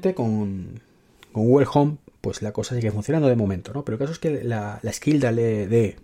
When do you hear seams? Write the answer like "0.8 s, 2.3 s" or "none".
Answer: none